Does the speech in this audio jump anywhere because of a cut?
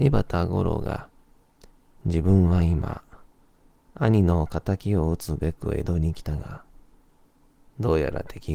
no; 0 cuts

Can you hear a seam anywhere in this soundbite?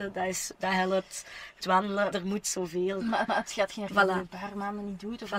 yes; 4 cuts; at 1.6 s, 2.1 s, 3.3 s, 3.9 s

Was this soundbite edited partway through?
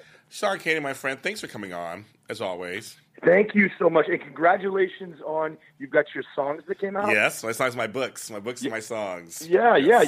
no; 0 cuts

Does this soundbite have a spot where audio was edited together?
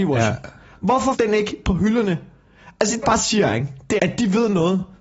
yes; 3 cuts; at 1.1 s, 3.0 s, 4.0 s

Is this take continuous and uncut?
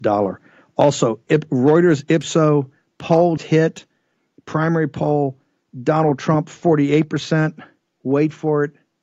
no; 1 cut; at 3.4 s

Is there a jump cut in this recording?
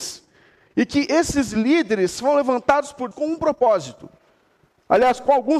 yes; 1 cut; at 3.1 s

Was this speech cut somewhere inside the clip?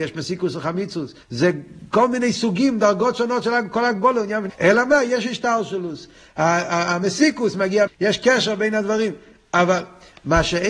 yes; 4 cuts; at 1.2 s, 4.5 s, 7.5 s, 7.9 s

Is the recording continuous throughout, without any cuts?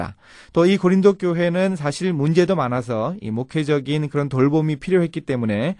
yes; 0 cuts

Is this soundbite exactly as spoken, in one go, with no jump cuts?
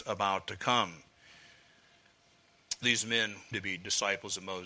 no; 2 cuts; at 2.8 s, 3.5 s

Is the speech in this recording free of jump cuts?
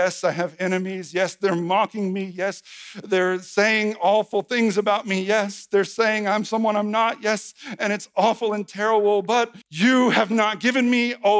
no; 1 cut; at 9.6 s

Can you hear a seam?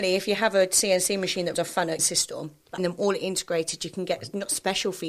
yes; 3 cuts; at 1.5 s, 2.0 s, 2.8 s

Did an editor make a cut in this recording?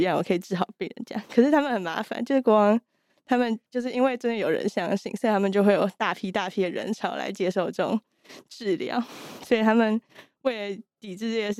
yes; 1 cut; at 3.7 s

